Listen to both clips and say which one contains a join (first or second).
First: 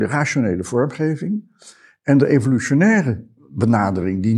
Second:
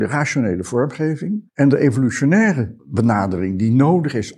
second